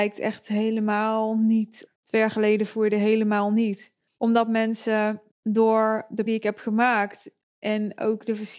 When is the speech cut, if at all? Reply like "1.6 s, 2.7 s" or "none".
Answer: 1.9 s, 4.1 s, 5.3 s, 6.3 s

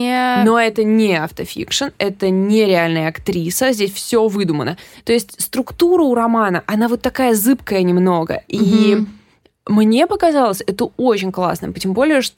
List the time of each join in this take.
none

